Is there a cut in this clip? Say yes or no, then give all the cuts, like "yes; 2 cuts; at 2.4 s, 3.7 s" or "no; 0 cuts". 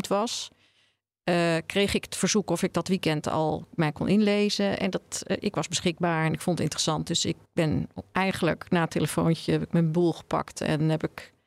yes; 1 cut; at 7.4 s